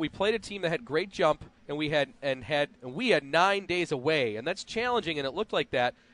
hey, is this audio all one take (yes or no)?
no